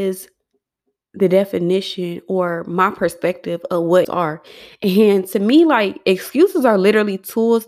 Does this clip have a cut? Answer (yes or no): yes